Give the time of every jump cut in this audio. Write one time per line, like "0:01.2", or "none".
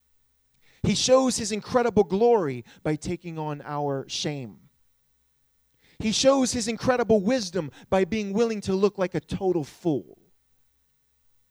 none